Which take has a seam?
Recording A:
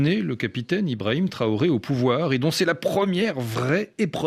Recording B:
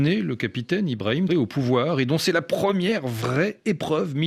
B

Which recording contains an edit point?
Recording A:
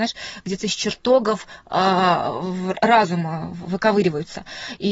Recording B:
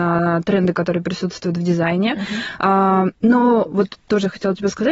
B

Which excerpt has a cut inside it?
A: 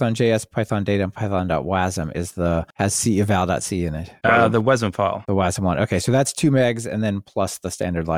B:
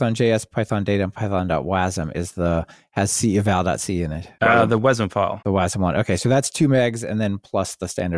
A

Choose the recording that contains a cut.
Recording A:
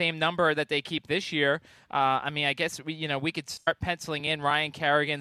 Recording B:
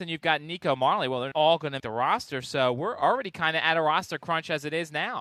B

